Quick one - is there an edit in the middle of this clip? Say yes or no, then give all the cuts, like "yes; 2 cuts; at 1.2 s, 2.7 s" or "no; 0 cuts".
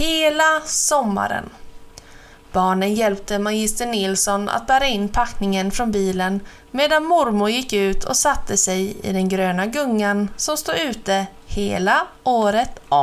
yes; 1 cut; at 2.3 s